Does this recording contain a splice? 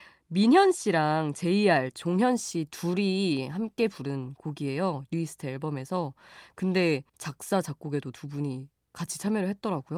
yes; 1 cut; at 7.1 s

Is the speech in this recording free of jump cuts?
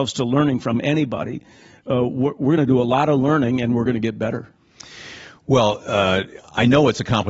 yes; 0 cuts

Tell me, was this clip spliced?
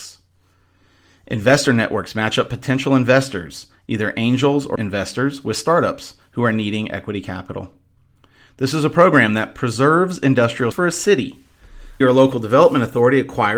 yes; 4 cuts; at 4.8 s, 8.0 s, 10.7 s, 12.0 s

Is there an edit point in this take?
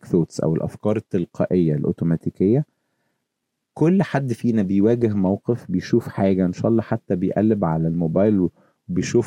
no; 0 cuts

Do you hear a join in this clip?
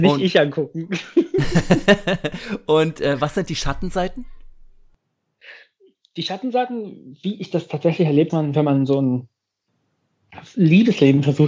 yes; 1 cut; at 8.3 s

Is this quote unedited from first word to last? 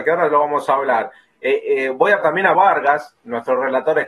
no; 2 cuts; at 2.2 s, 2.5 s

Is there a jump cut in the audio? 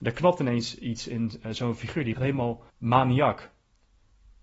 yes; 2 cuts; at 2.1 s, 2.7 s

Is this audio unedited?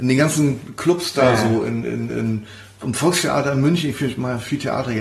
yes; 0 cuts

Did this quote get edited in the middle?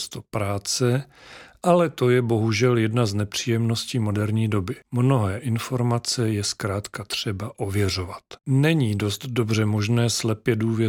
yes; 2 cuts; at 4.8 s, 8.4 s

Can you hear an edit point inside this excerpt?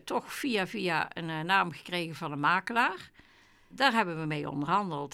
no; 0 cuts

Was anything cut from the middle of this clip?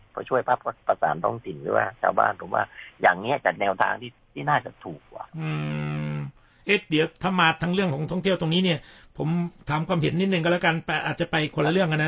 yes; 2 cuts; at 4.2 s, 5.3 s

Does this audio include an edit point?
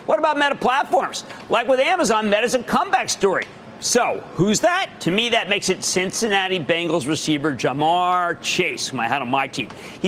no; 0 cuts

